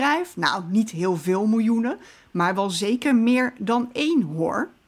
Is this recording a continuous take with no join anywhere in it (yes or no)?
yes